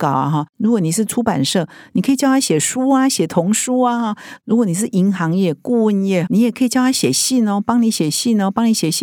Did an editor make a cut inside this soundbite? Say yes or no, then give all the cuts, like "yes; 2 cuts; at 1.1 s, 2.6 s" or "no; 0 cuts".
yes; 1 cut; at 6.3 s